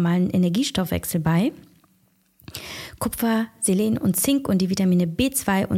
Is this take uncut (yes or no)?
yes